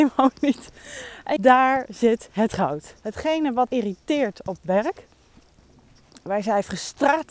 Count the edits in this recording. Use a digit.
3